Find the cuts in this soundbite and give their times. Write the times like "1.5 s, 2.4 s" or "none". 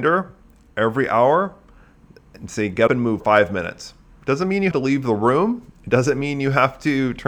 2.9 s, 3.2 s, 4.7 s